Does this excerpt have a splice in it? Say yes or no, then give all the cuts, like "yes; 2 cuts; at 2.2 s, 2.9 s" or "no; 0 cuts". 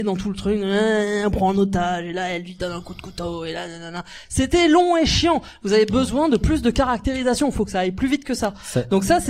no; 0 cuts